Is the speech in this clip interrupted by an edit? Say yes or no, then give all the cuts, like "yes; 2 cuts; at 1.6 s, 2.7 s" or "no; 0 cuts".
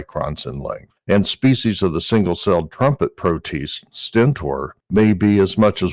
no; 0 cuts